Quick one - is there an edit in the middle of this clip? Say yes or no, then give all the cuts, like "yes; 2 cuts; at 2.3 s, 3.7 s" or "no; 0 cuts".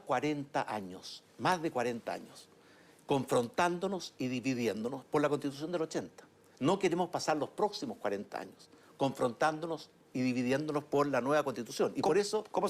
no; 0 cuts